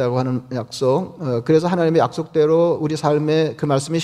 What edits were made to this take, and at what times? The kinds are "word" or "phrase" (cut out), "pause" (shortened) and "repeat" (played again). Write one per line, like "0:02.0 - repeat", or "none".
none